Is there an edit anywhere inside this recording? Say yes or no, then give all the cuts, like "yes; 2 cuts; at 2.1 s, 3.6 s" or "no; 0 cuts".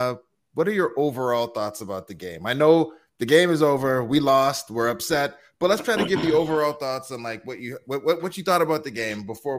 no; 0 cuts